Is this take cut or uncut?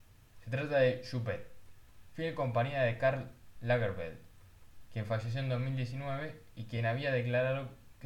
uncut